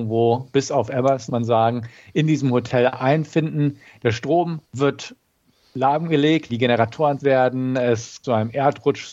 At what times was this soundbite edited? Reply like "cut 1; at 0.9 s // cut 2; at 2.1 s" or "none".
cut 1; at 1.3 s // cut 2; at 4.6 s // cut 3; at 6.5 s // cut 4; at 7.2 s // cut 5; at 8.2 s